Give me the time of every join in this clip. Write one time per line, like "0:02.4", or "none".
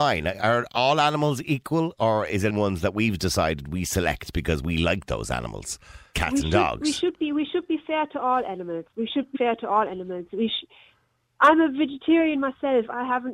0:02.5
0:06.1
0:08.9
0:09.3